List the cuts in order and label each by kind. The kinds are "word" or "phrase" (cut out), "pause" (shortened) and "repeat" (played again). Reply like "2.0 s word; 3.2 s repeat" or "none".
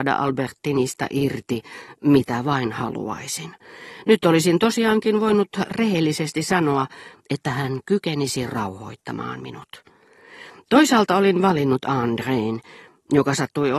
none